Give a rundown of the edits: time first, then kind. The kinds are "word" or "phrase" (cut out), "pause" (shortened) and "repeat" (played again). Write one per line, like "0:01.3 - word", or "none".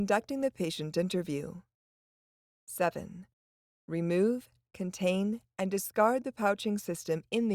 none